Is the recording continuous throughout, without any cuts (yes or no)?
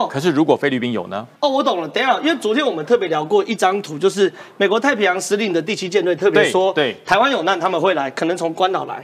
no